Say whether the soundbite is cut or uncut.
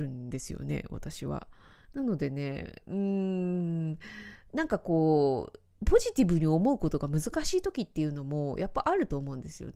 cut